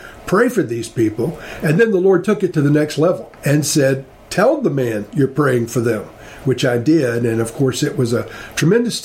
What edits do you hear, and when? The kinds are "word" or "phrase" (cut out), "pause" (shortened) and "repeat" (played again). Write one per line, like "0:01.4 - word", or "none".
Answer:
0:03.4 - pause